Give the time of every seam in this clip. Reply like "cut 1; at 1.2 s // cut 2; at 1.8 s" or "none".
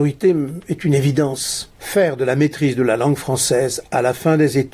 cut 1; at 1.8 s